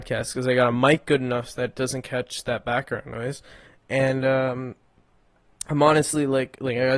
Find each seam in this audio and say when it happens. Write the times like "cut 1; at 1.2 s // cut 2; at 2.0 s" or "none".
none